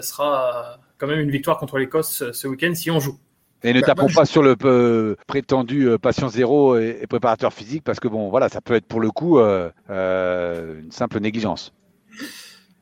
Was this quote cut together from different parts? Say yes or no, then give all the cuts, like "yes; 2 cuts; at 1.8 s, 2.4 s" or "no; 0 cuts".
yes; 2 cuts; at 5.2 s, 9.8 s